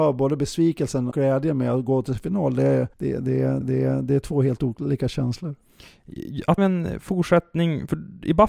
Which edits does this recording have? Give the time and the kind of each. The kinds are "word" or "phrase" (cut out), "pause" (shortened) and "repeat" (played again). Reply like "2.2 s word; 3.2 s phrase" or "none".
1.1 s word; 2.9 s pause; 3.6 s repeat; 6.6 s phrase